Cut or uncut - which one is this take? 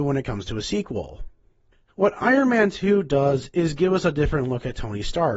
cut